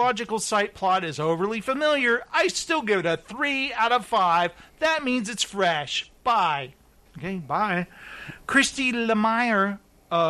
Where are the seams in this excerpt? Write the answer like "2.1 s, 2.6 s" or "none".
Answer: none